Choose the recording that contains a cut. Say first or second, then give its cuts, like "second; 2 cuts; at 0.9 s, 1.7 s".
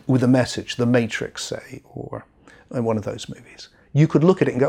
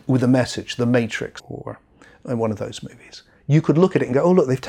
second; 1 cut; at 1.4 s